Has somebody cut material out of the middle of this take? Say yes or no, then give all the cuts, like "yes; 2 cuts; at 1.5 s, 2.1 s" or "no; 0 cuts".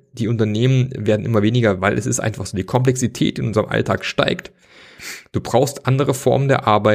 yes; 1 cut; at 1.8 s